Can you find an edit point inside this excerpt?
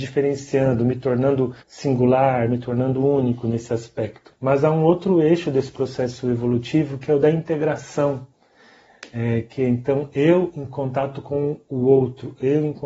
yes; 2 cuts; at 1.6 s, 4.4 s

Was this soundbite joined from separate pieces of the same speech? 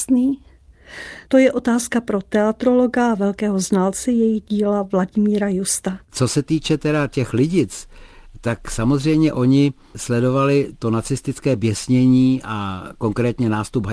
yes; 1 cut; at 6.0 s

